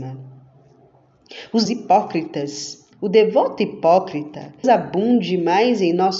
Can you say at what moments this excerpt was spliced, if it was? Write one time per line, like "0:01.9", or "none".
0:01.6
0:02.9
0:04.6